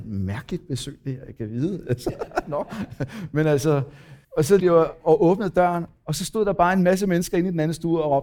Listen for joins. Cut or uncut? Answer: cut